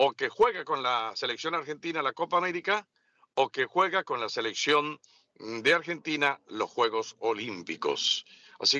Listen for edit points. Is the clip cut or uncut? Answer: uncut